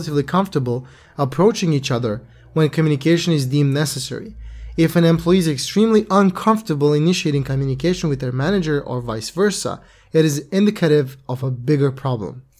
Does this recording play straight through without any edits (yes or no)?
yes